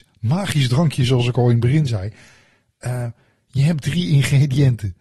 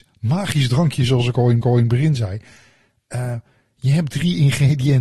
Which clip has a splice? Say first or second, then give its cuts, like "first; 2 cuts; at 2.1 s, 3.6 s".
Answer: second; 1 cut; at 1.6 s